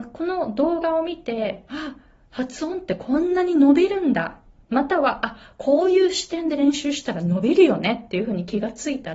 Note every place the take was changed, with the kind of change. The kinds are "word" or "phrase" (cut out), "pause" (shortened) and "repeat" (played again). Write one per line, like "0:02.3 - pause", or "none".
none